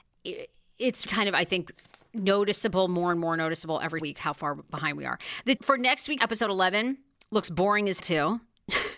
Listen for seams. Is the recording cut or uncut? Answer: cut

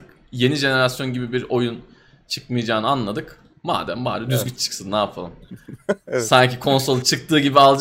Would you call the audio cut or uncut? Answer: uncut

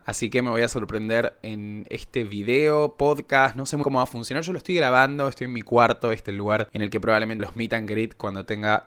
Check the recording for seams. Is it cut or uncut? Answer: cut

